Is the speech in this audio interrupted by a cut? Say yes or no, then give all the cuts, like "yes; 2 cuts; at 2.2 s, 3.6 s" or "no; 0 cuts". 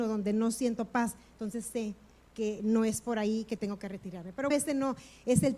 yes; 1 cut; at 4.5 s